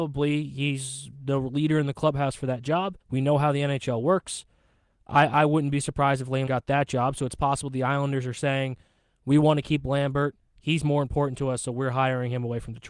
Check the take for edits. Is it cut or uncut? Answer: cut